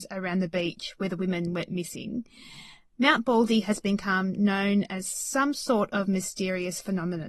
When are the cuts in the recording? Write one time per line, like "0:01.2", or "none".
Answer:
none